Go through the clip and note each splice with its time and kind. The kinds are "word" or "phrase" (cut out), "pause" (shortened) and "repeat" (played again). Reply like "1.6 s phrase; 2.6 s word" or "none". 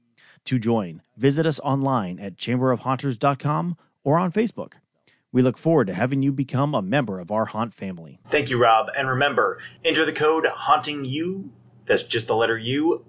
1.0 s pause; 8.2 s pause